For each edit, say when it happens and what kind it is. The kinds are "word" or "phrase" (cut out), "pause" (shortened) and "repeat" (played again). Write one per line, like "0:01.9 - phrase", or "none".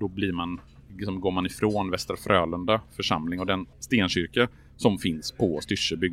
0:03.7 - pause